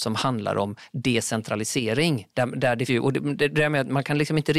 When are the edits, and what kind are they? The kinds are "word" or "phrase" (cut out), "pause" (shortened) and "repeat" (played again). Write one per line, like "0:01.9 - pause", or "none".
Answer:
0:02.3 - pause
0:02.9 - word